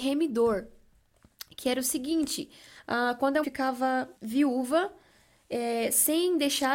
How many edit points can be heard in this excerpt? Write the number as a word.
two